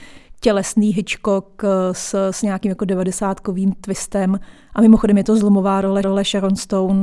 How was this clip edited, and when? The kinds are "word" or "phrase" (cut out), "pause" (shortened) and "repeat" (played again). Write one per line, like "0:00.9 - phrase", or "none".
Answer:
0:06.0 - repeat

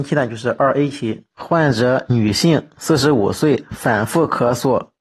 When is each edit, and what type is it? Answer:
0:01.3 - pause

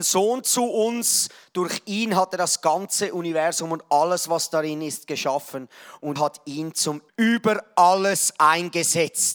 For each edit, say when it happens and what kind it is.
0:06.2 - word
0:07.1 - word

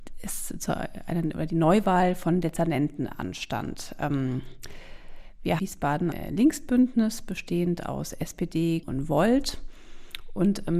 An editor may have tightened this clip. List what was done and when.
0:05.6 - phrase
0:06.1 - word
0:08.8 - phrase

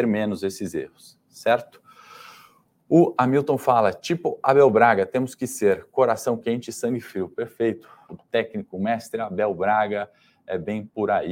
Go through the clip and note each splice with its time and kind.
none

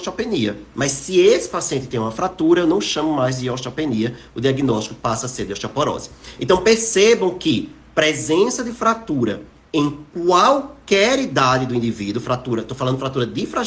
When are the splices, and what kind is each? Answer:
none

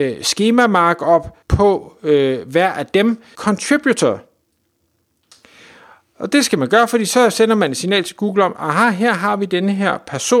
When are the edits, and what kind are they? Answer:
0:01.4 - pause
0:03.4 - word

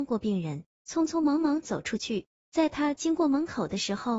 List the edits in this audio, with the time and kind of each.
none

